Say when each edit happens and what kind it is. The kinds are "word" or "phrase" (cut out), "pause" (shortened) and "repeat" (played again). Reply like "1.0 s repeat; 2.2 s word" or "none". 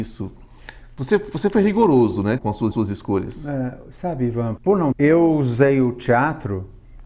2.4 s word; 2.7 s repeat; 4.6 s word; 4.9 s phrase